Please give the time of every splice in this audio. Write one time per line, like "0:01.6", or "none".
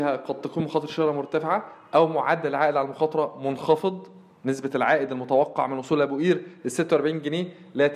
none